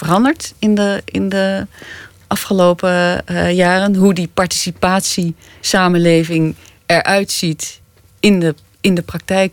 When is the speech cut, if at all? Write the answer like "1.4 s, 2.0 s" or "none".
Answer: none